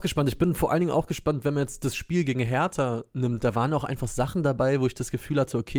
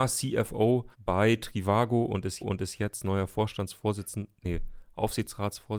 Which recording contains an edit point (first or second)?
second